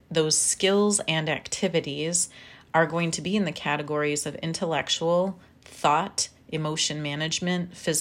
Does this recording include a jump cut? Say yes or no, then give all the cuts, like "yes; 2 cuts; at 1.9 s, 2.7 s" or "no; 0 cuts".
no; 0 cuts